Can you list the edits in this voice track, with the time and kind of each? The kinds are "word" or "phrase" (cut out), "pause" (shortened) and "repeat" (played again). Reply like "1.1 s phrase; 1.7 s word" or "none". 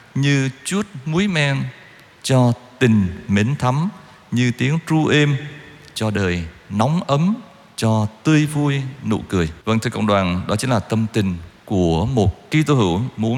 9.6 s pause